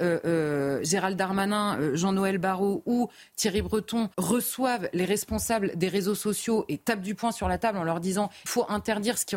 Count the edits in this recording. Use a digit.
2